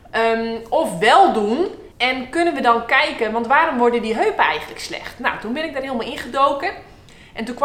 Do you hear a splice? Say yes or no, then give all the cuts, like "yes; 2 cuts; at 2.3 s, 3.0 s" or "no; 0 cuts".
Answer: yes; 1 cut; at 1.9 s